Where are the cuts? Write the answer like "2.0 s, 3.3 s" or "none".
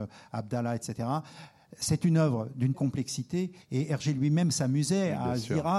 2.7 s, 3.6 s